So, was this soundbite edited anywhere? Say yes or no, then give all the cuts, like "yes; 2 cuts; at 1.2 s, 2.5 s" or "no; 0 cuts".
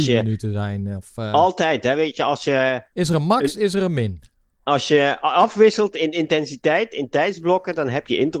no; 0 cuts